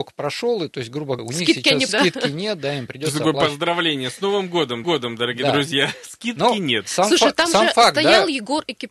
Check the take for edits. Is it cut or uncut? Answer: cut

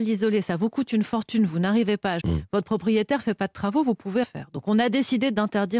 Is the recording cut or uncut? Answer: cut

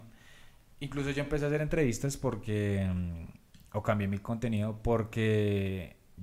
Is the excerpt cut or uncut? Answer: uncut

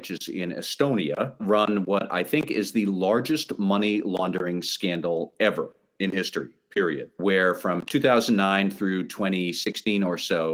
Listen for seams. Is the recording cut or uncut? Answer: uncut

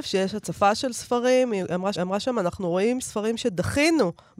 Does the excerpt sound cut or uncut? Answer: cut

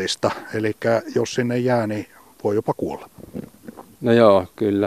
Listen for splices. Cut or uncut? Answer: uncut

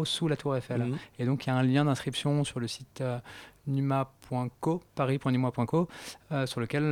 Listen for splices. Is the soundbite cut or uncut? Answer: cut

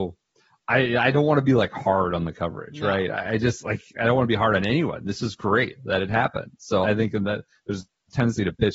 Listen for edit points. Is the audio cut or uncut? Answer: cut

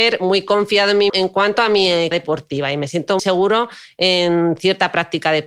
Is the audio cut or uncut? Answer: cut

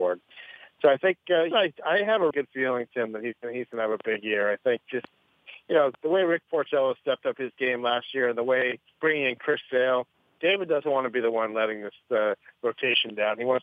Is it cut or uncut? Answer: cut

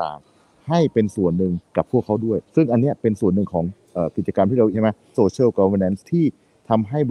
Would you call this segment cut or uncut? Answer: cut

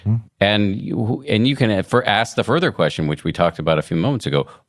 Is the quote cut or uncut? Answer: uncut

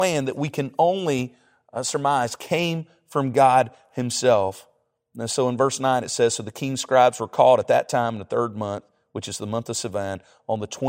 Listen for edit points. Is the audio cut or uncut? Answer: uncut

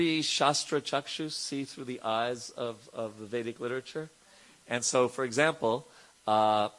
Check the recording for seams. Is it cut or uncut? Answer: uncut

